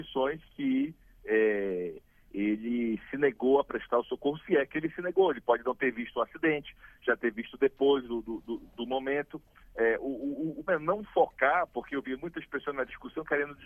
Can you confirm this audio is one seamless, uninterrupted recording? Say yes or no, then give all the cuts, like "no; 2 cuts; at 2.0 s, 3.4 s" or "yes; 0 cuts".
no; 2 cuts; at 9.6 s, 10.7 s